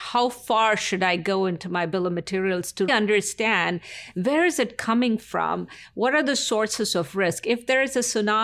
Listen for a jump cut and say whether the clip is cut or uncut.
cut